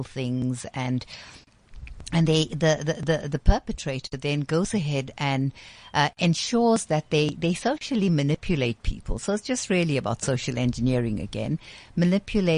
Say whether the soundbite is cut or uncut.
uncut